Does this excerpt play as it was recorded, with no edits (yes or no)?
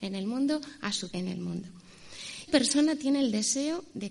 no